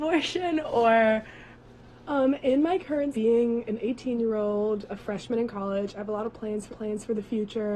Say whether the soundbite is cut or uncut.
cut